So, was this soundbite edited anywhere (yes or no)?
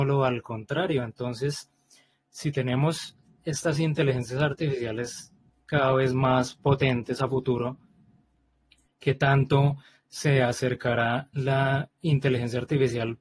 no